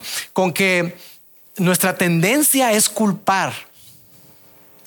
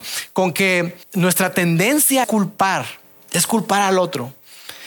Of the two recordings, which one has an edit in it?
second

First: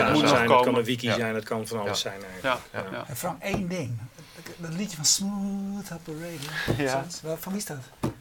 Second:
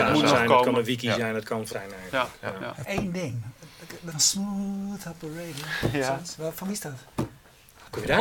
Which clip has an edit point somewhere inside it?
second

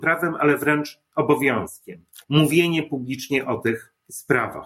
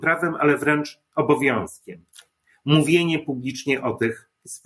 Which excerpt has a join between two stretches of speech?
first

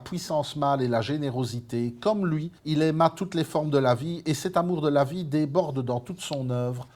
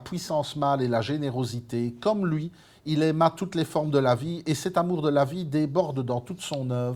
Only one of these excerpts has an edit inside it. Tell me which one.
first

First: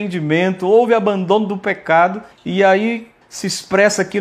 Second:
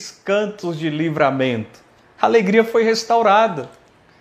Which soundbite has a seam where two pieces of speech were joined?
first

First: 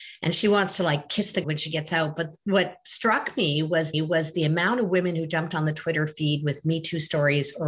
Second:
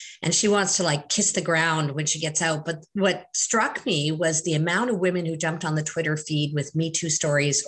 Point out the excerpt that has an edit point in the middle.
first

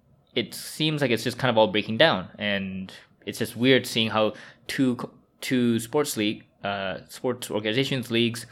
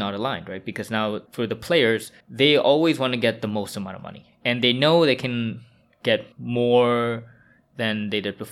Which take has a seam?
second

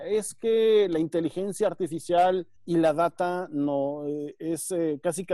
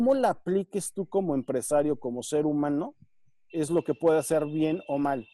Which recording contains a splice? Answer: first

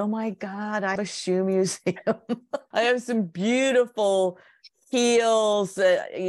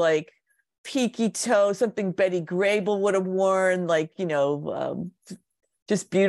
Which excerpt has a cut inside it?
first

